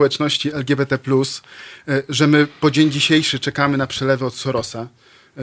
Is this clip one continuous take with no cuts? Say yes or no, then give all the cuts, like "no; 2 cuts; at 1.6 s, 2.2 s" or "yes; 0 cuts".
yes; 0 cuts